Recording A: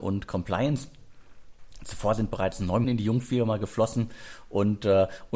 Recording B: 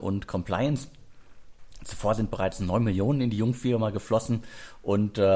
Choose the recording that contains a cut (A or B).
A